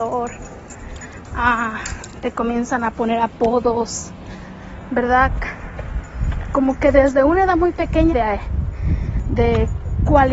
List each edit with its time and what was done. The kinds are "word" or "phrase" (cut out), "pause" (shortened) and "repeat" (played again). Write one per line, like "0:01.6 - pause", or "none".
0:08.1 - phrase